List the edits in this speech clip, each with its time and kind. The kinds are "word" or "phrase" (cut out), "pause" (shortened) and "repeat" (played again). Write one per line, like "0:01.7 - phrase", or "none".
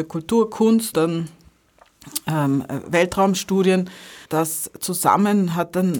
0:00.9 - word
0:04.2 - word